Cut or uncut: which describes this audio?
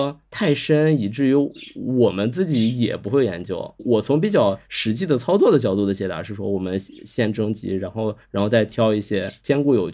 uncut